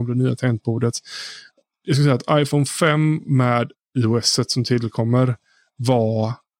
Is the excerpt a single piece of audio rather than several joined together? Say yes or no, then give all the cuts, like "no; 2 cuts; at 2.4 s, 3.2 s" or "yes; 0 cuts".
yes; 0 cuts